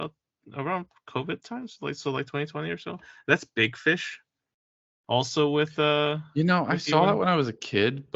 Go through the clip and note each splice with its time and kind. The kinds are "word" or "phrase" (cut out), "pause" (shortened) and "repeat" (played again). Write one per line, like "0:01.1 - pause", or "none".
none